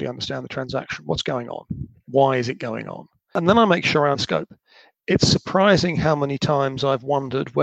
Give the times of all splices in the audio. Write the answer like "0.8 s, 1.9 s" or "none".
4.1 s